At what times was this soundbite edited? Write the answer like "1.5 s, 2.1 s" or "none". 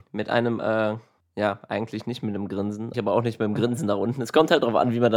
1.2 s, 2.9 s